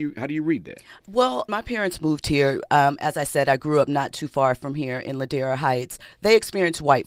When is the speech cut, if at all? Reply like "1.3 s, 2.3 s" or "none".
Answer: 1.5 s